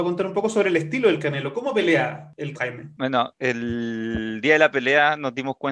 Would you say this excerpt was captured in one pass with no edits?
no; 1 cut; at 2.5 s

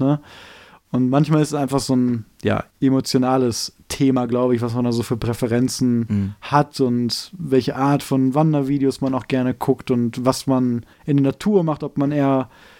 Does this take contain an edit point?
yes; 2 cuts; at 2.7 s, 10.9 s

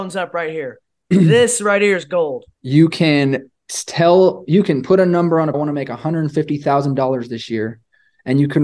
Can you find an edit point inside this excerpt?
yes; 2 cuts; at 2.5 s, 5.5 s

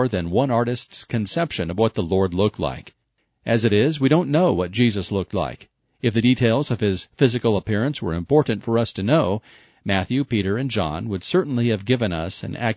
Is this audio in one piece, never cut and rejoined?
yes; 0 cuts

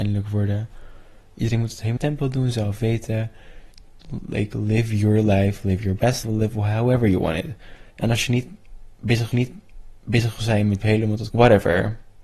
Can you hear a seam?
yes; 6 cuts; at 2.0 s, 6.2 s, 7.9 s, 9.3 s, 10.8 s, 11.3 s

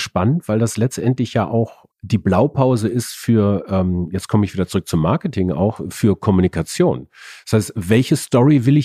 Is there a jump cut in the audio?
yes; 1 cut; at 1.9 s

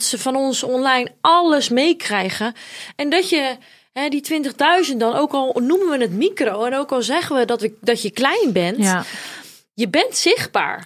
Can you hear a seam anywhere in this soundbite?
no; 0 cuts

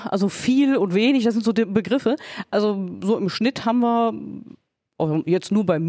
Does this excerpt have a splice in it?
no; 0 cuts

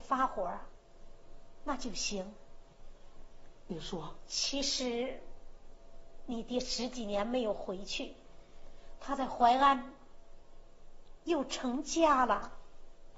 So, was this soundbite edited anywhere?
no; 0 cuts

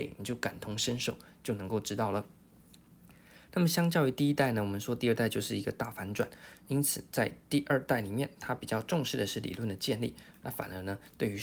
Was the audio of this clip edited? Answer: yes; 1 cut; at 6.7 s

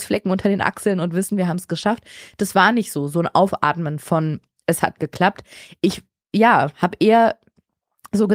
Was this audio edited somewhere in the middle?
no; 0 cuts

